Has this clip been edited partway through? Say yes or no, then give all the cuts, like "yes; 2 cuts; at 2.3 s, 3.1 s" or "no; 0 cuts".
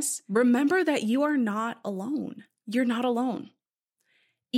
no; 0 cuts